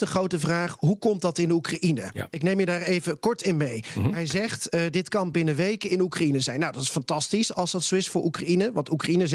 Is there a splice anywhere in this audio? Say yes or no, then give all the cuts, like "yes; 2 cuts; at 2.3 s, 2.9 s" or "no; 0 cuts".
no; 0 cuts